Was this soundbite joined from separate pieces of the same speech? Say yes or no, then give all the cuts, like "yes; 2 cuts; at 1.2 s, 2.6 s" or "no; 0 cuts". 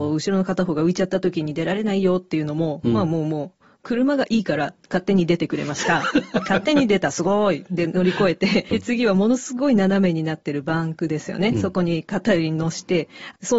yes; 1 cut; at 8.7 s